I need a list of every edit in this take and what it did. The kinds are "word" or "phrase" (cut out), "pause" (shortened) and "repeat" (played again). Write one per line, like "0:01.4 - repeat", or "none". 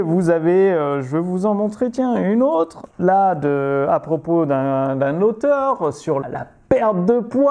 0:02.9 - pause
0:06.2 - word